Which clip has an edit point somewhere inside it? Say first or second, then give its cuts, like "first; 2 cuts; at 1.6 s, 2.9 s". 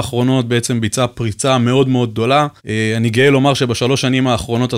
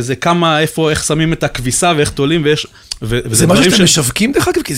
first; 1 cut; at 2.6 s